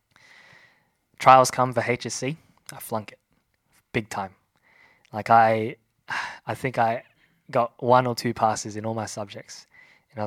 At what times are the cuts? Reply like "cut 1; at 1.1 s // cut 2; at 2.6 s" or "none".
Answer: none